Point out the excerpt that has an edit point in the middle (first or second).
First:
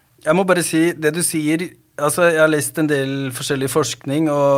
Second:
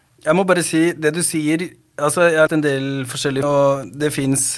second